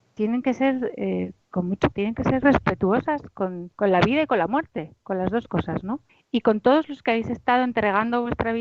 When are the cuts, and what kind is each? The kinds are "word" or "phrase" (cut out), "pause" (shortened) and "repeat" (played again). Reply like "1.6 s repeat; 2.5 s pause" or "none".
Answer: 1.4 s pause; 1.9 s word; 2.4 s word; 3.7 s pause; 6.1 s pause